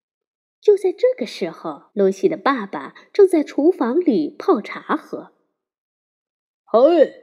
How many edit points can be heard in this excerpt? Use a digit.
1